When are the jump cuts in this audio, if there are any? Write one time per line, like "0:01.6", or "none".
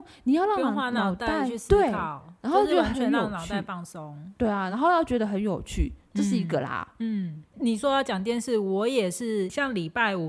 none